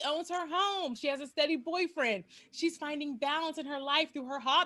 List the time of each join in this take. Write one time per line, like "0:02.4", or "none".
none